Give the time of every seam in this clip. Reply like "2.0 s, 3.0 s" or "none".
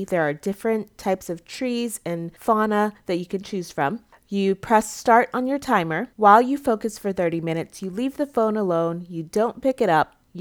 6.1 s